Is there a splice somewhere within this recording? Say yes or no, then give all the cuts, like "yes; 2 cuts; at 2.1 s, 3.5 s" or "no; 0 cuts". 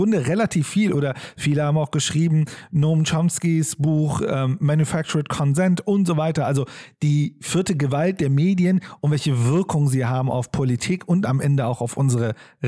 no; 0 cuts